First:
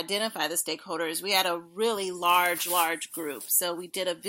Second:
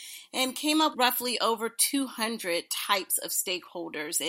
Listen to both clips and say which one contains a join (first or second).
second